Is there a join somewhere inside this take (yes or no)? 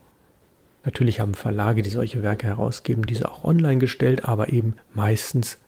no